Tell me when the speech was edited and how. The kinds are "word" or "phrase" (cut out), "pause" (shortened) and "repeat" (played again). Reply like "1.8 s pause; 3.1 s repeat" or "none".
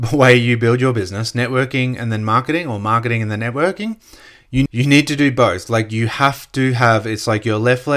4.7 s phrase